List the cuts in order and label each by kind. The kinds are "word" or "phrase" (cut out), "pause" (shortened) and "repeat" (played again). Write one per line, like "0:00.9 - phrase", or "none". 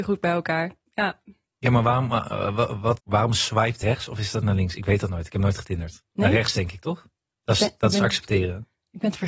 0:03.0 - word
0:03.8 - phrase